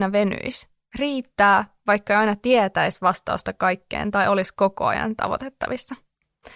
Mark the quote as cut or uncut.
uncut